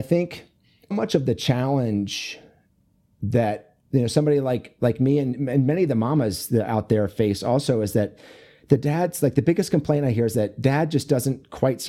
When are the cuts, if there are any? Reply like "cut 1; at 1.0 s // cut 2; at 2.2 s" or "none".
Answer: cut 1; at 0.9 s // cut 2; at 3.8 s